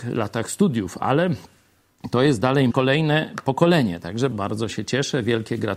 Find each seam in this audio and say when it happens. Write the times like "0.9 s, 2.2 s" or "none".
2.7 s, 4.3 s